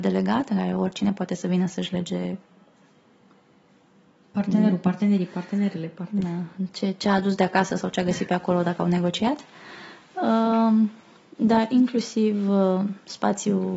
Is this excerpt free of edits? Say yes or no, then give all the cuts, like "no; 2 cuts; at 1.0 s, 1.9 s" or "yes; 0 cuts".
yes; 0 cuts